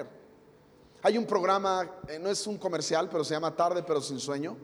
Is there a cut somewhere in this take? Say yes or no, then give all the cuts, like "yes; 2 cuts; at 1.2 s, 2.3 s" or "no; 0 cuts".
no; 0 cuts